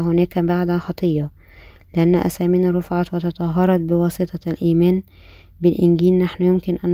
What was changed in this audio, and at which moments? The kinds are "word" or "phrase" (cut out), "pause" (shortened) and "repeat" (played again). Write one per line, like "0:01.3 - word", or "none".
none